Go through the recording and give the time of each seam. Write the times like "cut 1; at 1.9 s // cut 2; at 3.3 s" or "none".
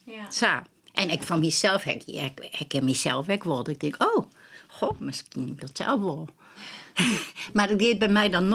cut 1; at 5.6 s